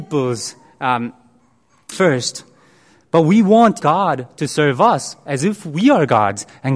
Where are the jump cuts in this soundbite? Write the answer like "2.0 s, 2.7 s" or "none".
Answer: 1.9 s, 3.8 s